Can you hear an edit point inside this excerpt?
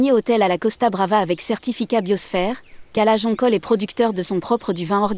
no; 0 cuts

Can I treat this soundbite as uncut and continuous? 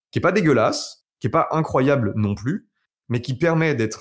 yes; 0 cuts

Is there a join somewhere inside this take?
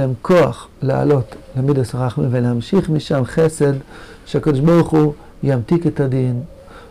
no; 0 cuts

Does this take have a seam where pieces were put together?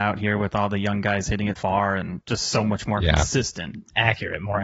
yes; 1 cut; at 1.6 s

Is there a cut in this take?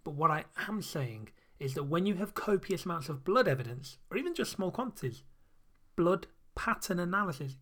no; 0 cuts

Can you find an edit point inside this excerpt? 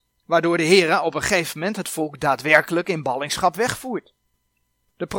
no; 0 cuts

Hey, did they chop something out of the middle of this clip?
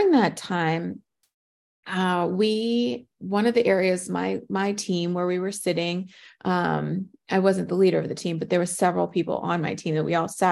no; 0 cuts

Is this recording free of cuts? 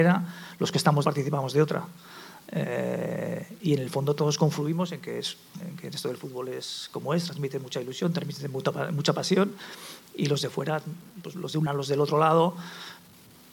no; 4 cuts; at 1.0 s, 5.6 s, 11.3 s, 11.7 s

